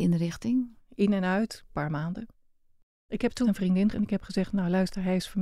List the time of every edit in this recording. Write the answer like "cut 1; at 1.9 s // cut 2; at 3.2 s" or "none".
cut 1; at 1.6 s // cut 2; at 3.4 s // cut 3; at 3.9 s